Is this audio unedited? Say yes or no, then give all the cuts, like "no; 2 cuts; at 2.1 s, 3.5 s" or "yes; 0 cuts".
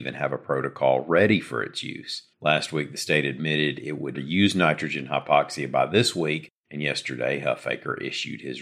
no; 3 cuts; at 2.3 s, 4.1 s, 6.6 s